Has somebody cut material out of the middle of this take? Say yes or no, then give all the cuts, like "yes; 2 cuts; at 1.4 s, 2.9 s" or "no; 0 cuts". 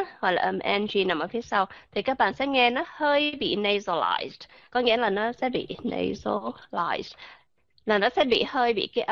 no; 0 cuts